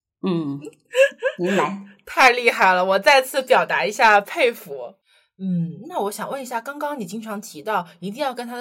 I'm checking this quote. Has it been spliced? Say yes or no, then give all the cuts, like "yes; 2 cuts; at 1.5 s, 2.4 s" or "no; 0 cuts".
no; 0 cuts